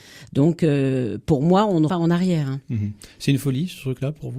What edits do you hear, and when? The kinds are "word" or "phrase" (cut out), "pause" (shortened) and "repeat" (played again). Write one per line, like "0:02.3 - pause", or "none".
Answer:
0:01.9 - word